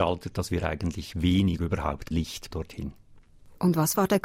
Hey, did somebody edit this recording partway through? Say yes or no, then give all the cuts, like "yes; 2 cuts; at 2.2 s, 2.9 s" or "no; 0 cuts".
yes; 4 cuts; at 1.1 s, 1.6 s, 2.1 s, 2.5 s